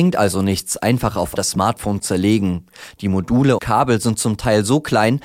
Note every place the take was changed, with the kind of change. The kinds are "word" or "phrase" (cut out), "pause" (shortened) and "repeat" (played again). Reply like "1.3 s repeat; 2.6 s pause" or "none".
1.4 s word; 2.0 s word; 3.6 s word